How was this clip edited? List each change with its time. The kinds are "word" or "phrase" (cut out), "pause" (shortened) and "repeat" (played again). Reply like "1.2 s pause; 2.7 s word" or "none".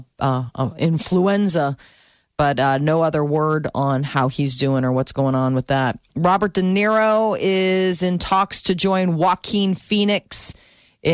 none